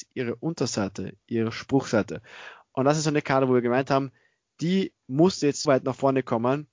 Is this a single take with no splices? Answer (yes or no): no